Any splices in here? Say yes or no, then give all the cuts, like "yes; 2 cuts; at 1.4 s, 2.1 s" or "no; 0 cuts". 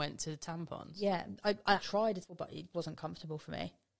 yes; 3 cuts; at 1.8 s, 2.2 s, 2.7 s